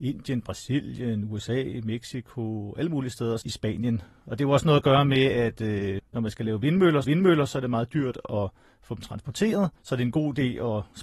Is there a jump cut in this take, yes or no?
yes